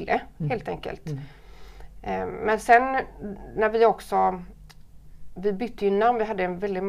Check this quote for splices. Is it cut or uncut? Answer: uncut